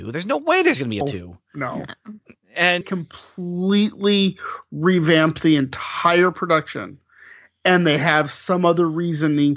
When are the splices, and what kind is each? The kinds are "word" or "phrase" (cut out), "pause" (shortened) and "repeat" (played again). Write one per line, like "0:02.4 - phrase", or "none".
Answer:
0:01.0 - word
0:02.8 - phrase